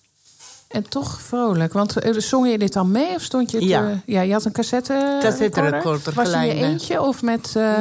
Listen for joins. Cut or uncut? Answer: cut